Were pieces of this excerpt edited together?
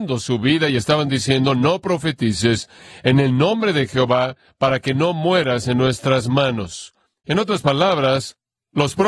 no; 0 cuts

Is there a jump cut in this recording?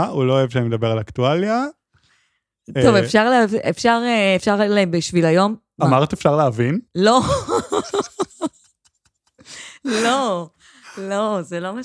yes; 1 cut; at 6.9 s

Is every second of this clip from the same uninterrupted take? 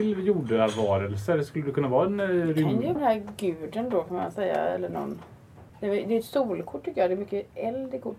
no; 2 cuts; at 3.0 s, 5.7 s

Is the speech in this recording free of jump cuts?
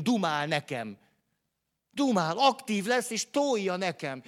yes; 0 cuts

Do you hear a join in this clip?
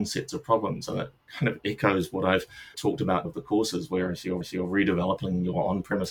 yes; 3 cuts; at 2.7 s, 3.2 s, 4.4 s

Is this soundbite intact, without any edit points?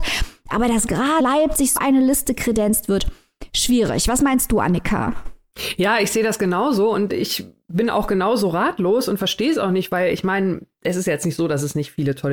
no; 3 cuts; at 1.2 s, 1.8 s, 7.1 s

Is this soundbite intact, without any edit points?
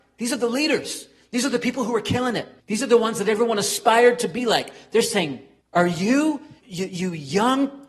no; 3 cuts; at 2.6 s, 5.6 s, 6.6 s

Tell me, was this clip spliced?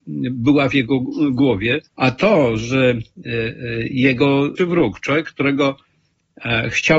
yes; 2 cuts; at 1.9 s, 4.6 s

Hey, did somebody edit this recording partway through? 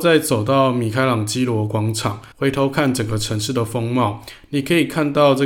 yes; 1 cut; at 2.3 s

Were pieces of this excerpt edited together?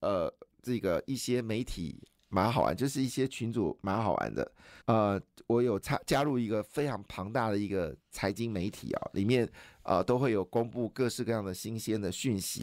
yes; 1 cut; at 4.8 s

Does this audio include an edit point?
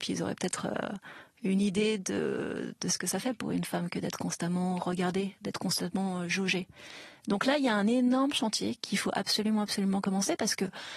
no; 0 cuts

